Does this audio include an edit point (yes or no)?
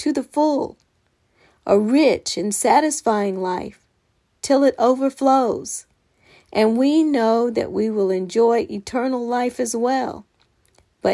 no